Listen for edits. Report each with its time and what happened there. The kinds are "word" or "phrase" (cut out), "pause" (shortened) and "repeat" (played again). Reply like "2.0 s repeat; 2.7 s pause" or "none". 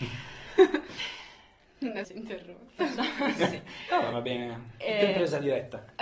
2.0 s word; 4.1 s word